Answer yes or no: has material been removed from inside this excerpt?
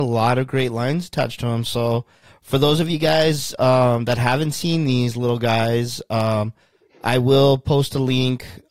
no